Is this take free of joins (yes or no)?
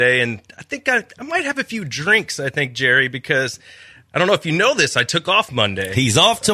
yes